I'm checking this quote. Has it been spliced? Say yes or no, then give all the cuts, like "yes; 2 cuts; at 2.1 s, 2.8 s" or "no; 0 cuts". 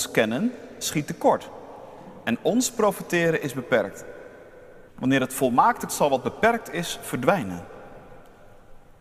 yes; 2 cuts; at 4.9 s, 5.9 s